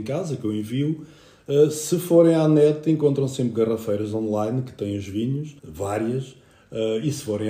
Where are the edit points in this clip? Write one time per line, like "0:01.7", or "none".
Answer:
0:05.6